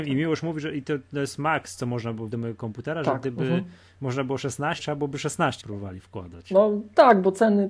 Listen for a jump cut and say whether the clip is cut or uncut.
cut